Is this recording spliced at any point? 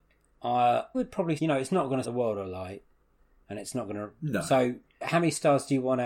yes; 4 cuts; at 0.9 s, 1.4 s, 2.0 s, 5.0 s

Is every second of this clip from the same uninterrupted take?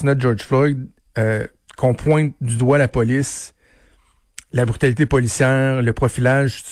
yes; 0 cuts

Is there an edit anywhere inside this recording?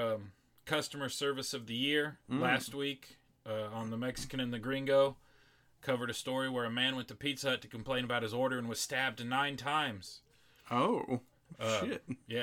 no; 0 cuts

